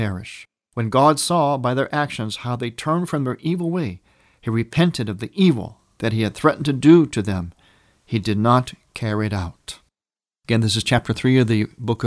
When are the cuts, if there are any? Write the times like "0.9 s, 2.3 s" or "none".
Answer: none